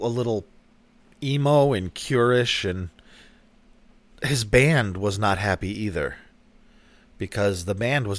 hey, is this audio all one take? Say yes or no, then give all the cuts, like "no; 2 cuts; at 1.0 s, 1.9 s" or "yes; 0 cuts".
yes; 0 cuts